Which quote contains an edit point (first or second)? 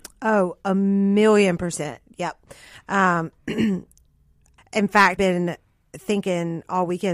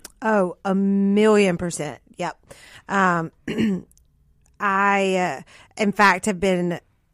first